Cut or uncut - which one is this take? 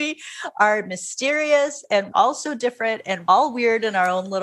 cut